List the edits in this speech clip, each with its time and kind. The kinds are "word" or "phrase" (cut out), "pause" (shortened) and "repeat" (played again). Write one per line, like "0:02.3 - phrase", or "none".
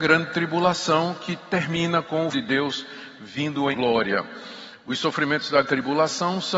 0:02.3 - word
0:03.7 - word
0:05.6 - word

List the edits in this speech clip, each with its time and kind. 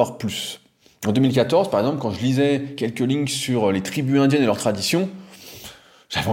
none

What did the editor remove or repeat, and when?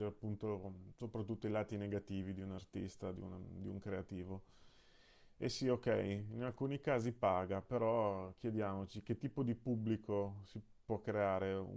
none

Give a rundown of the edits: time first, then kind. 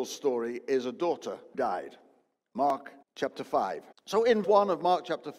0:01.5 - word
0:03.0 - pause
0:03.9 - pause
0:04.4 - word

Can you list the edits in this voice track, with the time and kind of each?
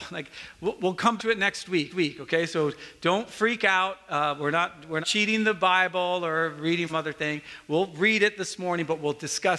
0:01.2 - word
0:01.9 - repeat
0:05.0 - word
0:06.9 - phrase

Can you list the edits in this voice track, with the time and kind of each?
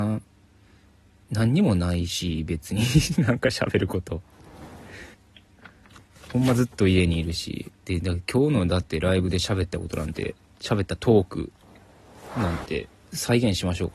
0:05.1 - pause
0:07.7 - pause

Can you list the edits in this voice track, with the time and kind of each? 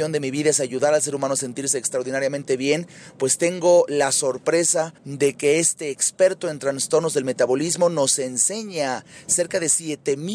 0:05.0 - pause

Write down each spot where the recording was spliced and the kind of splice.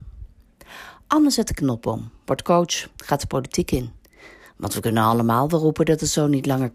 none

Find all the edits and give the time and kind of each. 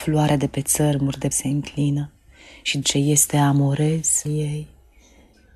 0:01.3 - word
0:02.8 - word
0:04.3 - word

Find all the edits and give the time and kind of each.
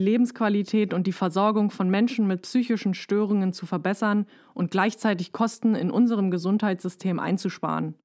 none

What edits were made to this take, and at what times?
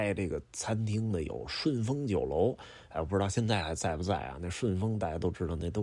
none

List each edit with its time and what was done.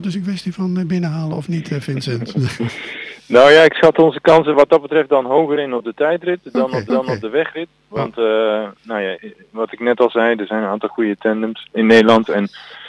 0:06.9 - repeat
0:08.8 - pause
0:09.1 - word

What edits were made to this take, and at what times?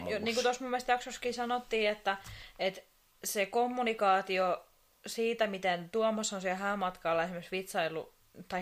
none

